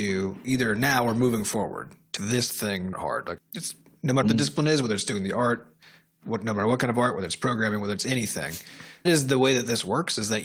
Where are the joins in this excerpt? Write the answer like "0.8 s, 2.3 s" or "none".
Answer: 2.2 s, 2.9 s, 3.4 s, 4.2 s, 9.0 s